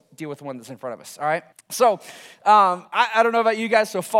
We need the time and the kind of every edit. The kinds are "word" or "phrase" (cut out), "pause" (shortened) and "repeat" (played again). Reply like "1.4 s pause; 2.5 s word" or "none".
1.5 s pause; 2.9 s pause